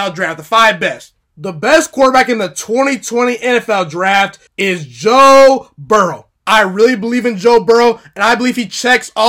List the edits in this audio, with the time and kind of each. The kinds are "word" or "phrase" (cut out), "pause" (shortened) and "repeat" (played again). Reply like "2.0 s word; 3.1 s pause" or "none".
1.2 s pause; 4.5 s pause; 6.4 s pause